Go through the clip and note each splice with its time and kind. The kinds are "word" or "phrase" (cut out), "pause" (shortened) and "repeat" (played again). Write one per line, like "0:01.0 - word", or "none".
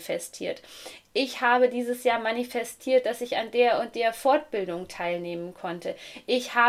none